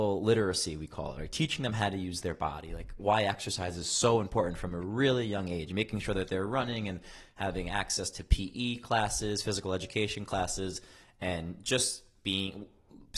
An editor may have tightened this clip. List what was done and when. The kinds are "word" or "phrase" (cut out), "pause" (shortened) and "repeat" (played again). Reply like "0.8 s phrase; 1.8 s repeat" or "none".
none